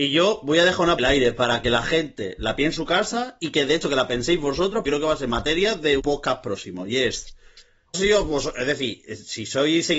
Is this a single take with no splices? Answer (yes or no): no